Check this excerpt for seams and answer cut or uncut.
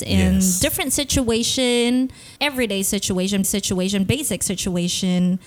cut